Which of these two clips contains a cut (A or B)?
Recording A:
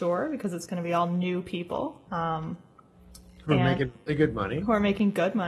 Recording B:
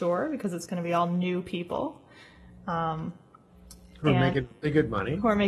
A